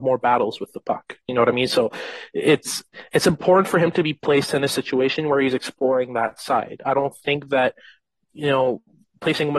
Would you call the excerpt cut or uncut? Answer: uncut